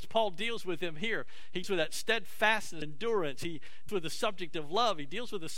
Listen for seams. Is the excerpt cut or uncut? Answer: cut